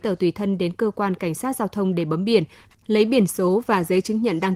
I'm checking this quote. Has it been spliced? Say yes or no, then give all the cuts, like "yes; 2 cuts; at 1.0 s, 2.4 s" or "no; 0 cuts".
no; 0 cuts